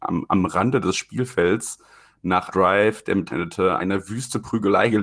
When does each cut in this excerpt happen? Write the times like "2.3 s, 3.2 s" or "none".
2.5 s, 3.3 s, 3.8 s